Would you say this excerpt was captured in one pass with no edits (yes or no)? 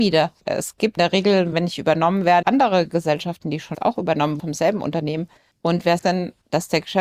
no